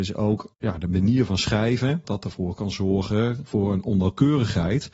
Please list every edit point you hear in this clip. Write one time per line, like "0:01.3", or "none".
0:02.0